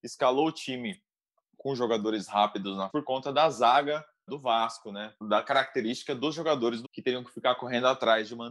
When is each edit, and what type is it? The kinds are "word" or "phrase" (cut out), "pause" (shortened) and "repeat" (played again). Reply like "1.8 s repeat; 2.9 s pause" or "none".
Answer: 2.9 s word; 4.3 s word; 5.2 s word; 6.8 s word